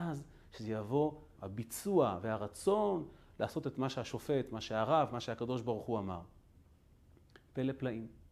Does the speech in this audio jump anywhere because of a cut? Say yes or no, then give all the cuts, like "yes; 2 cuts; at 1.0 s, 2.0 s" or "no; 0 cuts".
yes; 1 cut; at 1.4 s